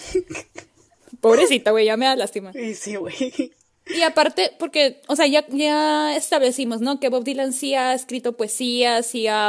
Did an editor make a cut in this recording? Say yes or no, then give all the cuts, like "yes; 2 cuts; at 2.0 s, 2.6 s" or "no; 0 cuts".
no; 0 cuts